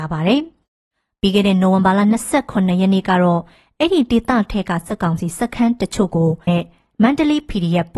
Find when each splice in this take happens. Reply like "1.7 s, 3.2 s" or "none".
6.5 s